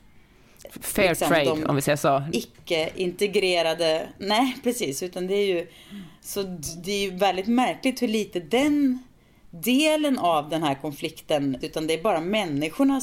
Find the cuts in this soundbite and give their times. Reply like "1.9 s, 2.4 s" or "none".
11.6 s